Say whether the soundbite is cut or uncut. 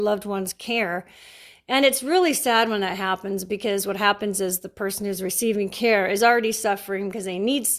uncut